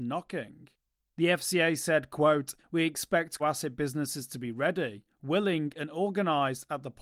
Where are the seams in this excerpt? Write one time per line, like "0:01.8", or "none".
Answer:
0:03.4